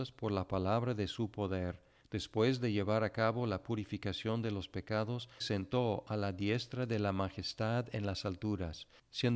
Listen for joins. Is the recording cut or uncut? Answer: cut